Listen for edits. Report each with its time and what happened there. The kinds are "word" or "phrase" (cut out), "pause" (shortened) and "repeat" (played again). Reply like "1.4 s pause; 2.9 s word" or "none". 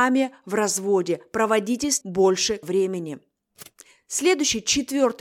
2.0 s word; 2.6 s word